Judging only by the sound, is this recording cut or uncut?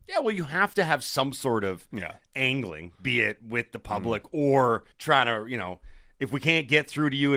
cut